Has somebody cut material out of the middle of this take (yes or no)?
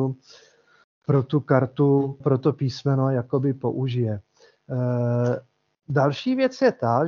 yes